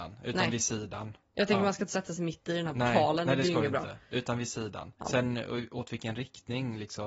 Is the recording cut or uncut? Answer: cut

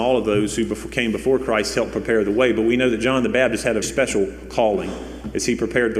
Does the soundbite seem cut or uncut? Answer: cut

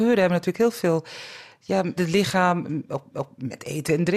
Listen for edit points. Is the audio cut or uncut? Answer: cut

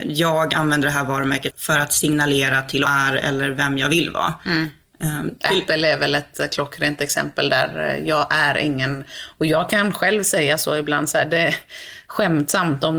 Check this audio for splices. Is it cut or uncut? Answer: cut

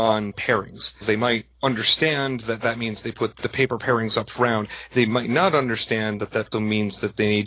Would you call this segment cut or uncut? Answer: cut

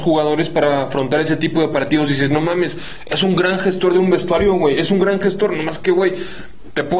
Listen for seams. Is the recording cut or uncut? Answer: uncut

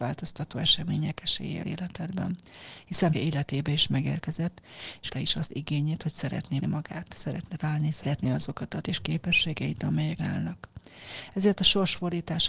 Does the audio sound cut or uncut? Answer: cut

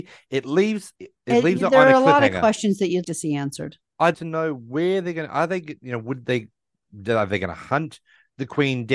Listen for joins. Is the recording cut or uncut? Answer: cut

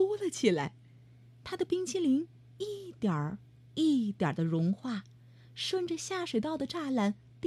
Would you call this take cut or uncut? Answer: uncut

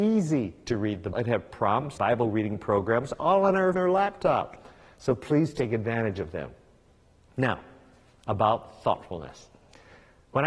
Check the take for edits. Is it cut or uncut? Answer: cut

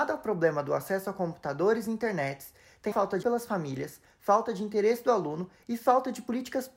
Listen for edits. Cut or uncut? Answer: cut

